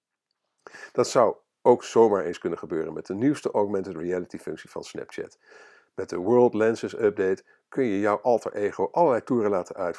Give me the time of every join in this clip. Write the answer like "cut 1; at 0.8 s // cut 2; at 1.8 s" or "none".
none